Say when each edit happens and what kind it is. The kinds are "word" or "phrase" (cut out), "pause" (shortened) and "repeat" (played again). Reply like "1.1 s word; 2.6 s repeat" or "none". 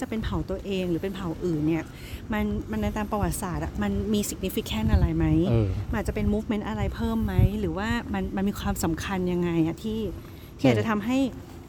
none